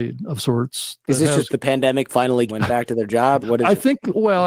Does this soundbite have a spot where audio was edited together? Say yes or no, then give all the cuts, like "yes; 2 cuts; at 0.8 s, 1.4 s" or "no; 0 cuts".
yes; 4 cuts; at 1.5 s, 2.1 s, 2.5 s, 3.4 s